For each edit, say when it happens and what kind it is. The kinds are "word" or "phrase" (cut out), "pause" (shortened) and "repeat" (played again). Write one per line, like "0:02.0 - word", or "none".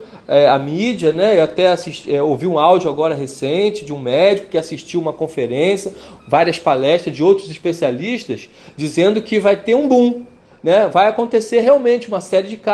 none